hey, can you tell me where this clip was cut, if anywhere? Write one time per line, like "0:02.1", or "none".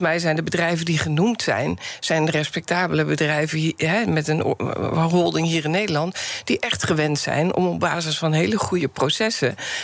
none